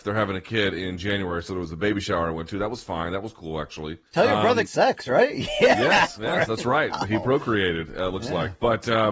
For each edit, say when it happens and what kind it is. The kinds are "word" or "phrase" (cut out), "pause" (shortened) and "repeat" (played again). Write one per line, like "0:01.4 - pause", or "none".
0:04.1 - pause
0:04.7 - phrase
0:06.2 - word